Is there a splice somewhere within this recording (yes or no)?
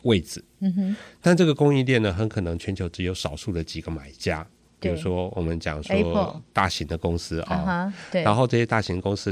yes